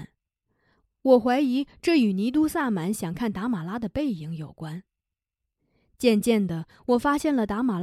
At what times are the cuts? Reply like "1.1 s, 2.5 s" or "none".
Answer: none